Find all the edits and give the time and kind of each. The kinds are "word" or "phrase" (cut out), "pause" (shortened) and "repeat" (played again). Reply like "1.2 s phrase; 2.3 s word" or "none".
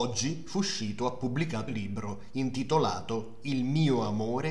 1.7 s word